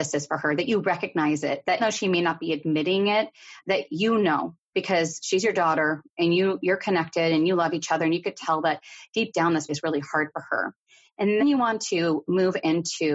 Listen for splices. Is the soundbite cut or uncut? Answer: cut